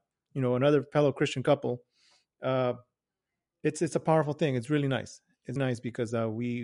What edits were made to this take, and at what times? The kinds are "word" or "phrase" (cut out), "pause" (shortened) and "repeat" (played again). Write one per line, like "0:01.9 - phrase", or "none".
0:05.6 - word